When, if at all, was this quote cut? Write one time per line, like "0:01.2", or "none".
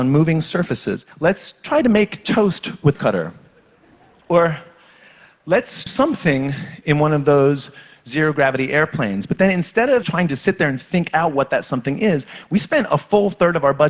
0:01.1
0:02.9
0:05.9
0:10.0